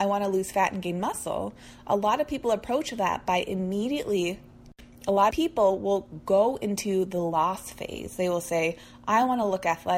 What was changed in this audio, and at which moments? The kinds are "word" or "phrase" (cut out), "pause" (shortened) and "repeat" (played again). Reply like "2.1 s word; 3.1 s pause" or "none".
5.3 s word